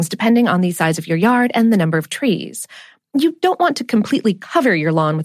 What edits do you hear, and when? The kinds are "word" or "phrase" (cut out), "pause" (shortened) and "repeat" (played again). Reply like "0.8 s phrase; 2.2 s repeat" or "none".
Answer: none